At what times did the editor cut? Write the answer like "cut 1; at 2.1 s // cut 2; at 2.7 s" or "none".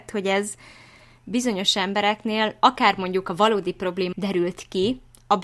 cut 1; at 4.1 s

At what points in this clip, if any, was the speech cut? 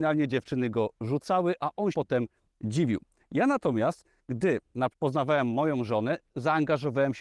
cut 1; at 1.9 s // cut 2; at 4.9 s

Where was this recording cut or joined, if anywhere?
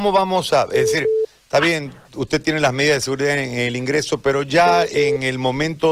none

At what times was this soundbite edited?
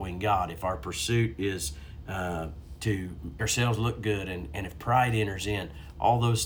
cut 1; at 3.4 s

